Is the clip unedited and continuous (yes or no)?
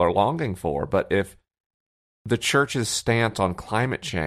yes